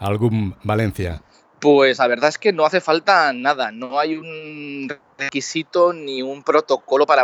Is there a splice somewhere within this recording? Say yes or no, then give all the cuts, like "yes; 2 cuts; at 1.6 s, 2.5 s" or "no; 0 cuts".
no; 0 cuts